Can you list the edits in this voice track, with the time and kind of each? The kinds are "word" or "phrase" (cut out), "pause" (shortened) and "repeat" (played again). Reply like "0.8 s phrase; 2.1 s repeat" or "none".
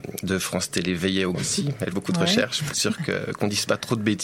1.3 s word; 1.9 s word; 2.7 s word